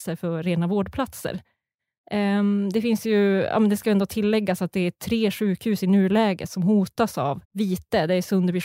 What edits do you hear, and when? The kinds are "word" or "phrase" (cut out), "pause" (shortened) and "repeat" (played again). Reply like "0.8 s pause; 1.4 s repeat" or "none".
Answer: 7.4 s pause